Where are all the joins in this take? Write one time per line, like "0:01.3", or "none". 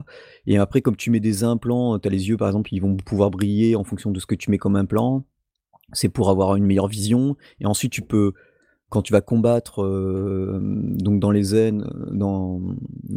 0:08.9